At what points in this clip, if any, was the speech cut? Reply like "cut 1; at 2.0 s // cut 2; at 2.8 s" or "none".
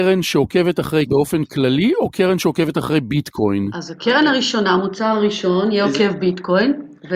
cut 1; at 1.1 s